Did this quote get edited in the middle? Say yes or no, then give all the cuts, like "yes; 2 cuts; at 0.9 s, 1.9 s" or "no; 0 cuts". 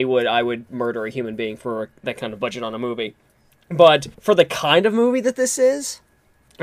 yes; 1 cut; at 4.1 s